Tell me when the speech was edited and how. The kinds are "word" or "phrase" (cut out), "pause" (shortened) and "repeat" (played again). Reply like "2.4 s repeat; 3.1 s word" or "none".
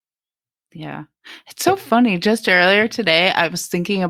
none